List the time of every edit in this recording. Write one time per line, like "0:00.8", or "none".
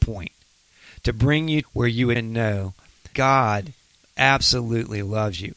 0:01.6
0:02.2
0:03.1